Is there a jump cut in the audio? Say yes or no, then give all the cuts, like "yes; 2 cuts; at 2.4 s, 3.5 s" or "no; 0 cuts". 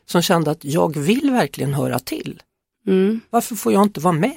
no; 0 cuts